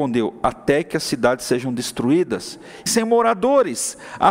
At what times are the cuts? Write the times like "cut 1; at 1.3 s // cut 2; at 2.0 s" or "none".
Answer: cut 1; at 2.9 s